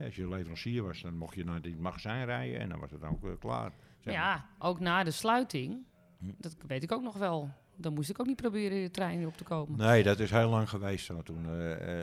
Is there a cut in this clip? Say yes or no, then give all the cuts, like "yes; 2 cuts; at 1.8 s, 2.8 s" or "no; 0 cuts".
no; 0 cuts